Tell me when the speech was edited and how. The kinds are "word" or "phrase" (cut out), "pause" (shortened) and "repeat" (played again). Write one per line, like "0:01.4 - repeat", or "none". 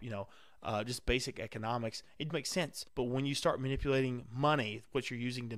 0:02.3 - word
0:02.9 - pause